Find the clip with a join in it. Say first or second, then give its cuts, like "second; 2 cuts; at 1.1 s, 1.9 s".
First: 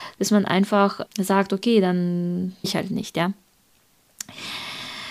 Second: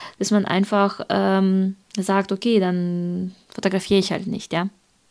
first; 2 cuts; at 1.1 s, 2.6 s